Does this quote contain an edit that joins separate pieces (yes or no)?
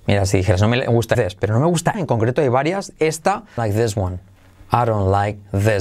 yes